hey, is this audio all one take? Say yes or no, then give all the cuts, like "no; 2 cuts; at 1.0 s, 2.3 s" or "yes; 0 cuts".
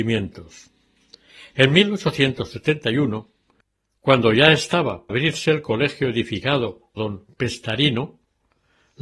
no; 2 cuts; at 5.1 s, 7.0 s